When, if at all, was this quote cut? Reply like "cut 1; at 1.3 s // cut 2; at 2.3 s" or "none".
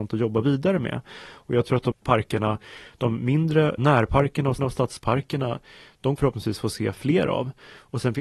cut 1; at 1.9 s // cut 2; at 3.8 s // cut 3; at 4.6 s // cut 4; at 6.2 s